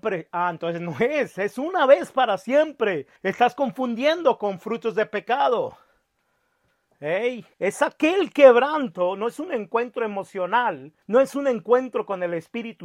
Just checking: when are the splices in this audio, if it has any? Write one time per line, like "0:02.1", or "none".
0:03.2
0:07.5
0:11.0